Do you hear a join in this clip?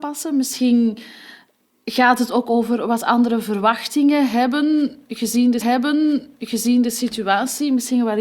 yes; 1 cut; at 5.6 s

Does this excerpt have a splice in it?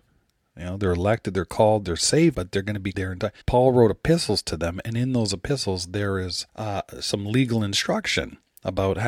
yes; 4 cuts; at 2.3 s, 2.9 s, 3.4 s, 6.5 s

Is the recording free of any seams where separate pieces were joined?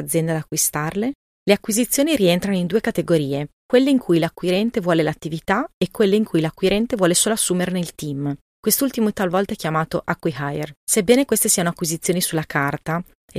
no; 1 cut; at 9.1 s

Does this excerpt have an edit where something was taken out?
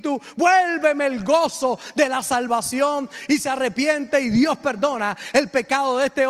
no; 0 cuts

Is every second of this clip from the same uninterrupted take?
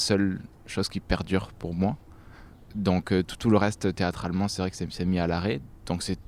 yes; 0 cuts

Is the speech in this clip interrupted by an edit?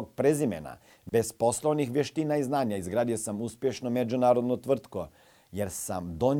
no; 0 cuts

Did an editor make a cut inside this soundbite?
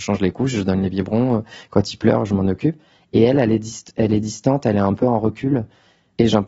no; 0 cuts

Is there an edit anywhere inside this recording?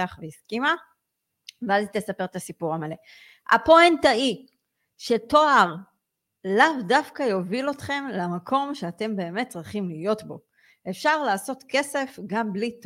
no; 0 cuts

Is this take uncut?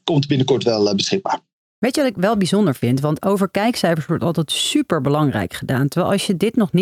yes; 0 cuts

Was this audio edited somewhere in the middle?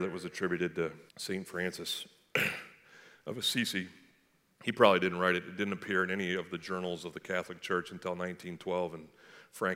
yes; 1 cut; at 1.1 s

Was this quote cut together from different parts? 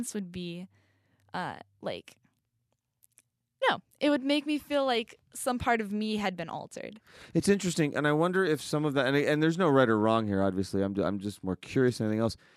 yes; 1 cut; at 3.6 s

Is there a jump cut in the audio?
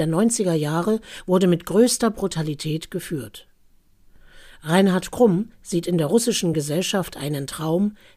no; 0 cuts

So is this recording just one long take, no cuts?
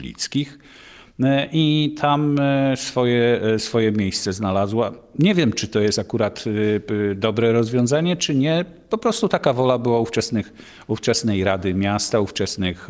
yes; 0 cuts

